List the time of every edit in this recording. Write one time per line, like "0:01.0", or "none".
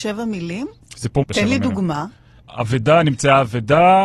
0:01.2